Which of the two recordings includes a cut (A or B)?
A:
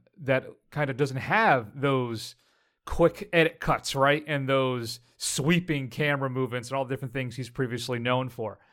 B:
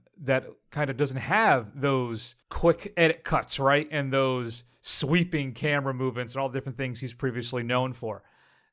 B